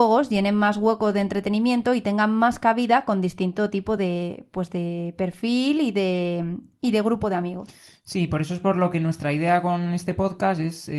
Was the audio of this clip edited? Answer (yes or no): no